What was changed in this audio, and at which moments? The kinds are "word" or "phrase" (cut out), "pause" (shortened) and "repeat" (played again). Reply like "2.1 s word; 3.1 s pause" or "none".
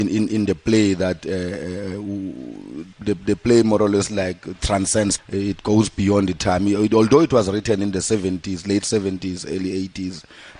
2.9 s word; 5.2 s word